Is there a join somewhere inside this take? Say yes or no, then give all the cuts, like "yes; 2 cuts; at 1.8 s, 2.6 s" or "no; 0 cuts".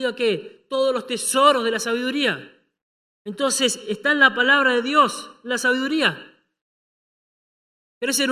no; 0 cuts